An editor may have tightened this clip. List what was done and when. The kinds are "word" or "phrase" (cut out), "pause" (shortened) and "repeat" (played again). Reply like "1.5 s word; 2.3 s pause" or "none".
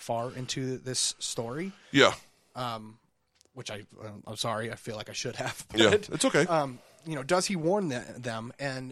none